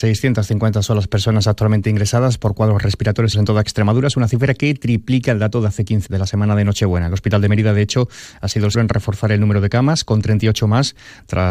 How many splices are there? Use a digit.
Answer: 3